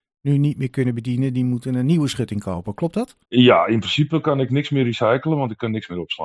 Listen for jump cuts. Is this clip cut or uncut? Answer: cut